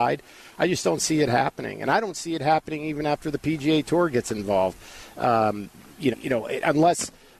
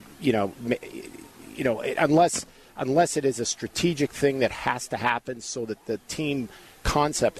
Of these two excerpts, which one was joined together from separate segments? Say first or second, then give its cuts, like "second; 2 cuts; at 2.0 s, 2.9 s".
first; 1 cut; at 6.1 s